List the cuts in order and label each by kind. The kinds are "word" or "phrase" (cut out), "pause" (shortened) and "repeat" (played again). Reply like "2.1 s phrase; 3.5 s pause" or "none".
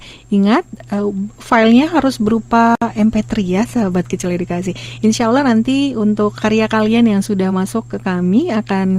none